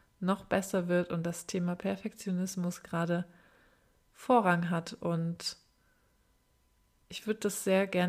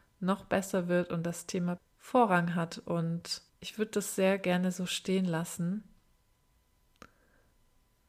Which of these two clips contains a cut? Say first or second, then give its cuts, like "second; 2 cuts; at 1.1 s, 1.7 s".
second; 2 cuts; at 1.8 s, 3.5 s